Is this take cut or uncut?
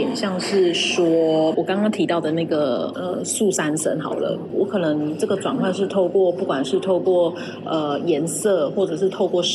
cut